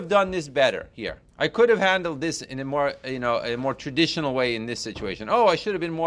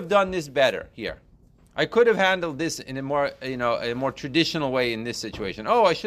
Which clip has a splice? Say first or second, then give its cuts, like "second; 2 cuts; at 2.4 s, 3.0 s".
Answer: first; 1 cut; at 1.3 s